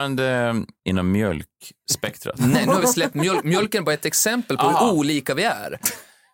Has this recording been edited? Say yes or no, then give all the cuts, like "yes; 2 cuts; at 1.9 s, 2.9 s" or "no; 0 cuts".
no; 0 cuts